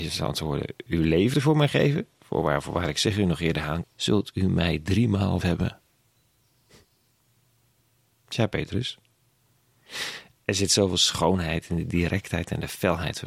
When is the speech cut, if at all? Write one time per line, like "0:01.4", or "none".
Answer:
0:01.3
0:03.8
0:05.4